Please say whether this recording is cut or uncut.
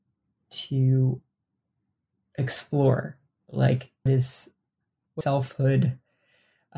cut